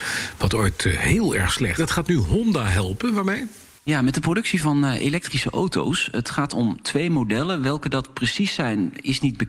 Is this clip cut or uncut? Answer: cut